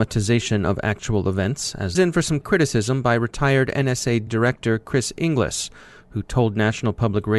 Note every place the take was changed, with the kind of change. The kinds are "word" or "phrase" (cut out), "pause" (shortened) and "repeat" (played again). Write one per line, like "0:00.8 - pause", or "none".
0:01.9 - phrase
0:02.4 - word
0:04.3 - word